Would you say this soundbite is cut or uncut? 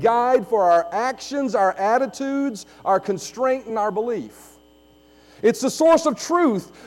uncut